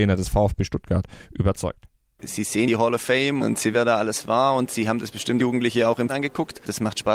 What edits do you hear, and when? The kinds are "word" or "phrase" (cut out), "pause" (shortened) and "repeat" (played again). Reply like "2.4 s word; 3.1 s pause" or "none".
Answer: 2.7 s word; 3.4 s word; 3.7 s word; 5.4 s word; 6.1 s word